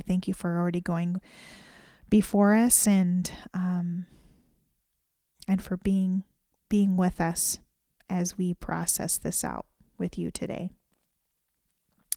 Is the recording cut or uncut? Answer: uncut